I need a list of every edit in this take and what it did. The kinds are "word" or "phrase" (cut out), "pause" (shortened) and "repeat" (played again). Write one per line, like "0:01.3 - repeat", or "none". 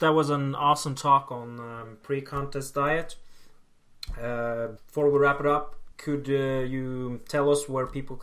0:04.8 - pause
0:05.9 - pause